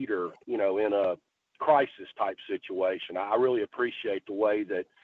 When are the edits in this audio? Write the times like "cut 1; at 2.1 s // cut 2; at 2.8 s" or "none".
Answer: none